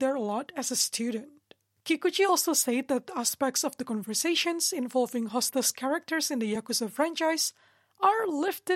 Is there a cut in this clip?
no; 0 cuts

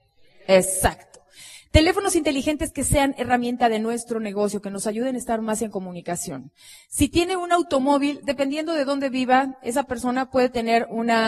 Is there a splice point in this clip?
no; 0 cuts

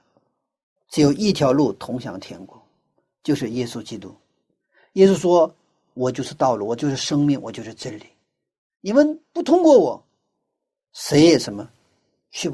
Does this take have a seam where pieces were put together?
no; 0 cuts

